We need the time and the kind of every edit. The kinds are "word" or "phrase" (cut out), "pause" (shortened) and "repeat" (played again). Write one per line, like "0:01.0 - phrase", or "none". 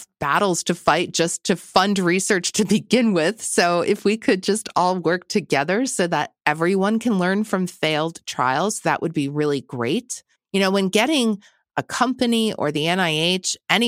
none